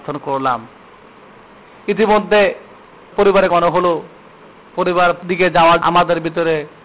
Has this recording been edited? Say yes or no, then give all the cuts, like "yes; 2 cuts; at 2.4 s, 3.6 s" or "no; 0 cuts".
yes; 4 cuts; at 3.1 s, 3.5 s, 5.2 s, 5.8 s